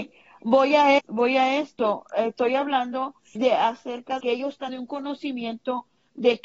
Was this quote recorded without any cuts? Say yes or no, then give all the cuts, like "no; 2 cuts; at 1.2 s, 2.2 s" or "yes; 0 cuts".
no; 4 cuts; at 1.0 s, 3.4 s, 4.2 s, 4.7 s